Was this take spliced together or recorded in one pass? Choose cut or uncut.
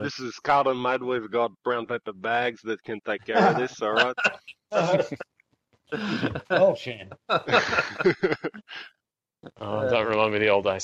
uncut